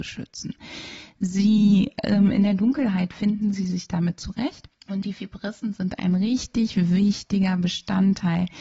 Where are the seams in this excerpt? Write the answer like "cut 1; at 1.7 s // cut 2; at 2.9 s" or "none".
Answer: cut 1; at 4.8 s

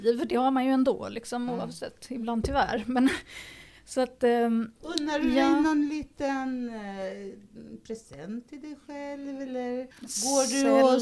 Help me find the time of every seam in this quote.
cut 1; at 4.8 s // cut 2; at 9.9 s

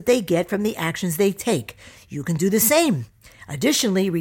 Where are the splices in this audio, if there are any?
none

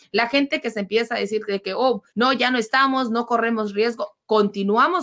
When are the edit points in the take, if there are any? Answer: cut 1; at 2.1 s

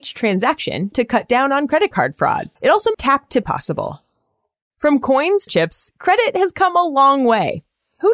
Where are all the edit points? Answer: cut 1; at 2.6 s // cut 2; at 2.9 s // cut 3; at 3.4 s // cut 4; at 5.5 s

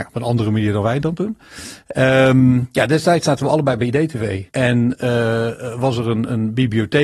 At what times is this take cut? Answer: cut 1; at 4.5 s

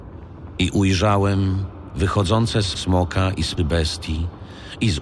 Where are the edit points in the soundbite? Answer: cut 1; at 2.7 s // cut 2; at 3.6 s

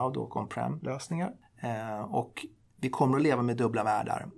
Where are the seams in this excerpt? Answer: none

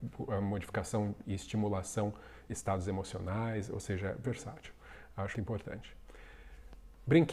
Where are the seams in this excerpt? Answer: cut 1; at 1.2 s // cut 2; at 2.5 s // cut 3; at 4.2 s // cut 4; at 5.3 s

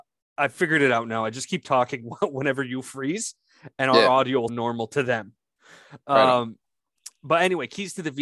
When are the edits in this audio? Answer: cut 1; at 4.5 s

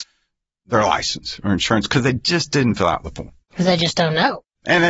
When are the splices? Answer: none

